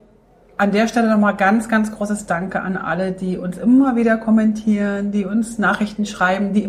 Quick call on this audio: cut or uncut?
uncut